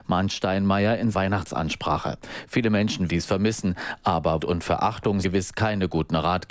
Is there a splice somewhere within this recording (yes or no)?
yes